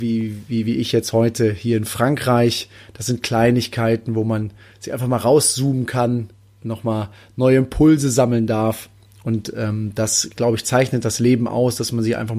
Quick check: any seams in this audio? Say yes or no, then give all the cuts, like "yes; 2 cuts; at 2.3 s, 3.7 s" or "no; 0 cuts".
no; 0 cuts